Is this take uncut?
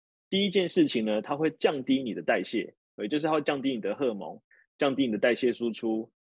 yes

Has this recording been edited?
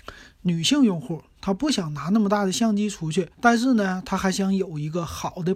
yes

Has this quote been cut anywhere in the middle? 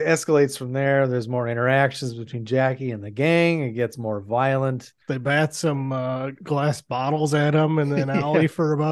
yes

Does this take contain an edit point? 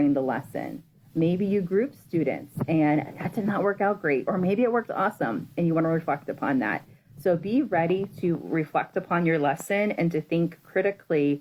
no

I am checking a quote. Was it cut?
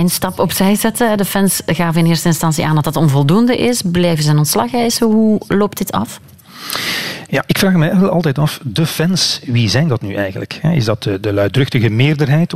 no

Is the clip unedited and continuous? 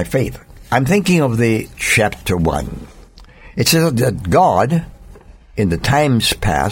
no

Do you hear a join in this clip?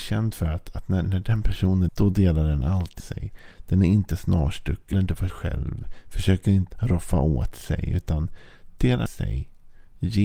yes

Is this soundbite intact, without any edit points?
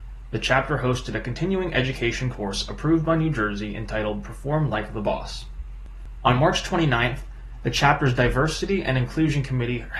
yes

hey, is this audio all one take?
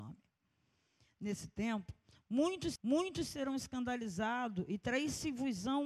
no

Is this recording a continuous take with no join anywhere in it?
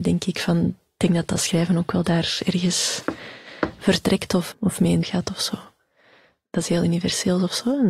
no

